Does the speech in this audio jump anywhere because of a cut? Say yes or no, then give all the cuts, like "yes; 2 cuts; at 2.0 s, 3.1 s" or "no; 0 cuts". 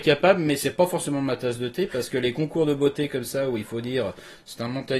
no; 0 cuts